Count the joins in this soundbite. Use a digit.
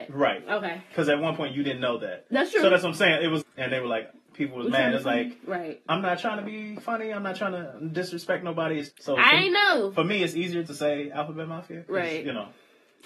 3